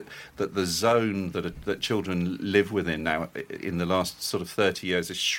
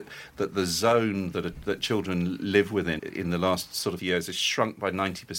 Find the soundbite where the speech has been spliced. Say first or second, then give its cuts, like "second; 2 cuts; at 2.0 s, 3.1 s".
second; 2 cuts; at 3.0 s, 4.0 s